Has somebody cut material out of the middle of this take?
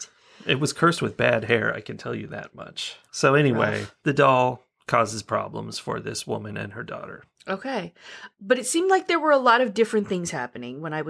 no; 0 cuts

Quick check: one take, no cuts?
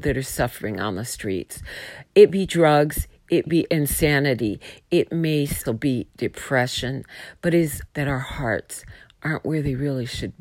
no; 4 cuts; at 2.3 s, 3.5 s, 5.7 s, 7.9 s

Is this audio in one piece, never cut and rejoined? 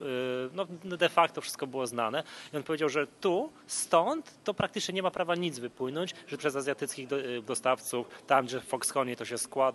no; 1 cut; at 6.4 s

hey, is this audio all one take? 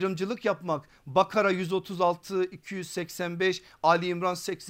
yes; 0 cuts

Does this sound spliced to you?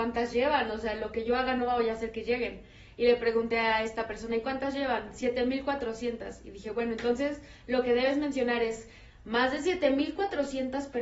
no; 0 cuts

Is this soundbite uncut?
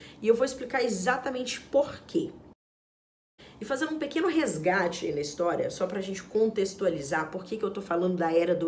yes; 0 cuts

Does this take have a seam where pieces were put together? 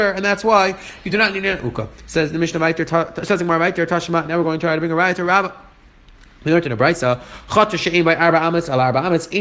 no; 0 cuts

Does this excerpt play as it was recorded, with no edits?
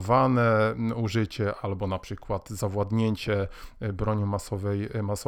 yes; 0 cuts

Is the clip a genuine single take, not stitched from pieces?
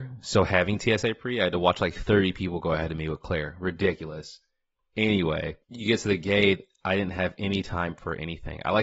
no; 1 cut; at 5.6 s

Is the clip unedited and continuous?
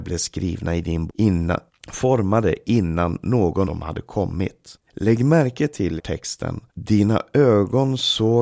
no; 6 cuts; at 1.1 s, 1.7 s, 3.6 s, 4.9 s, 6.0 s, 6.7 s

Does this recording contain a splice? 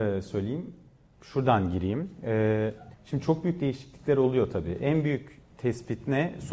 yes; 1 cut; at 2.9 s

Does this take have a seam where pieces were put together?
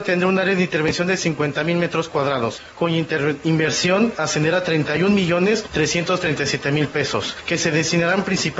no; 0 cuts

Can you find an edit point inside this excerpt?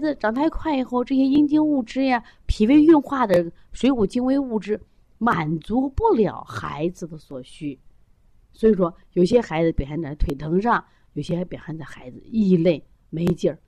no; 0 cuts

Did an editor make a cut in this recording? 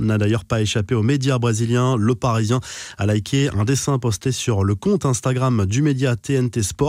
no; 0 cuts

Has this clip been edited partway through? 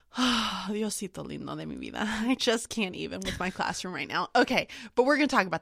no; 0 cuts

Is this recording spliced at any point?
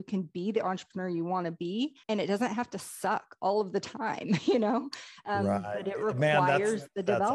yes; 1 cut; at 2.0 s

